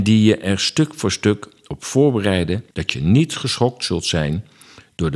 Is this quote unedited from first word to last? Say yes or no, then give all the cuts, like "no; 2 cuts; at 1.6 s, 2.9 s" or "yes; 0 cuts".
no; 1 cut; at 2.7 s